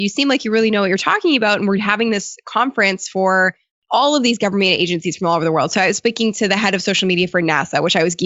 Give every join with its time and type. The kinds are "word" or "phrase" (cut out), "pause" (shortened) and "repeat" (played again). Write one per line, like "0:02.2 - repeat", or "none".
none